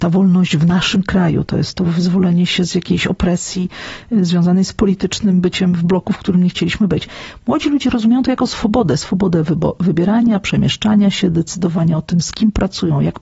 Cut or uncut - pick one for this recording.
uncut